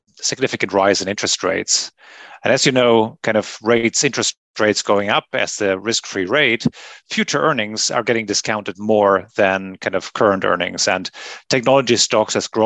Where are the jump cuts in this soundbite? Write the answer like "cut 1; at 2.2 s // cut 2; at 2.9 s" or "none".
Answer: none